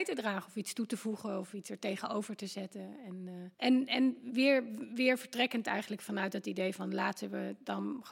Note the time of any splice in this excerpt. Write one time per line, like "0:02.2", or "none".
0:03.5